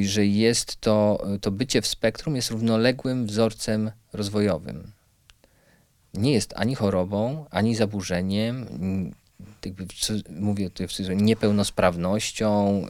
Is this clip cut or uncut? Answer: uncut